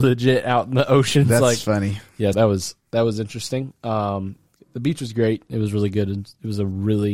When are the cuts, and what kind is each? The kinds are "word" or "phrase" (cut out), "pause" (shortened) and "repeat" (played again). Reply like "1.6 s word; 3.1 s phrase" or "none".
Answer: 2.3 s word